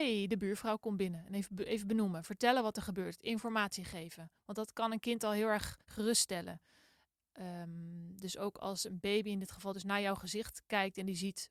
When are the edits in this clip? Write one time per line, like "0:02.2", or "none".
0:05.8